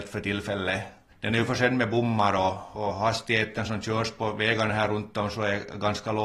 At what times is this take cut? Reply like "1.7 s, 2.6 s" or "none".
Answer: none